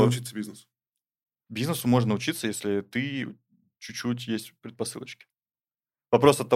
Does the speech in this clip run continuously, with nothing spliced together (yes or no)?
yes